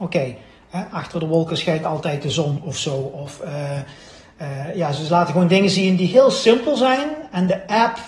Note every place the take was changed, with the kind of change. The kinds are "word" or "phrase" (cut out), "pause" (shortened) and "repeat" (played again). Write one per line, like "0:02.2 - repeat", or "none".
none